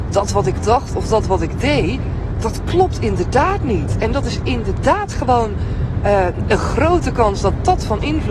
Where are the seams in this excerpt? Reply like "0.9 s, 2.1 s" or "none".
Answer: none